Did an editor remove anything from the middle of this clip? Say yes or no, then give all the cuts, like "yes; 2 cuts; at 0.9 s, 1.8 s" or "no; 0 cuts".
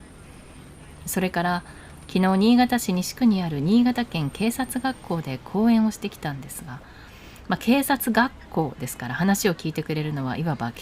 no; 0 cuts